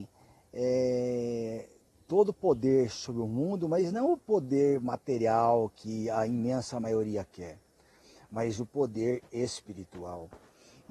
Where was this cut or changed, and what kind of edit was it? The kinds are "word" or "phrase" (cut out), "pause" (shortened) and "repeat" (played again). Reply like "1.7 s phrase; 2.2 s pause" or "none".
none